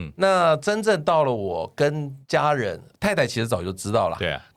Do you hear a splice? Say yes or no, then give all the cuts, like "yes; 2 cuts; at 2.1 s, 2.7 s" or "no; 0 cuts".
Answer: yes; 1 cut; at 2.2 s